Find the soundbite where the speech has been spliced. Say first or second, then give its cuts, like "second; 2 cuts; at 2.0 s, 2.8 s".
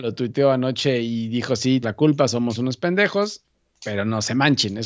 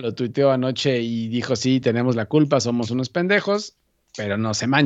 first; 1 cut; at 1.8 s